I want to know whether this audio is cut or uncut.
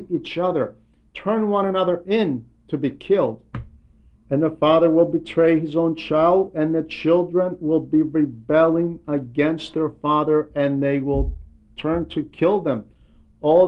uncut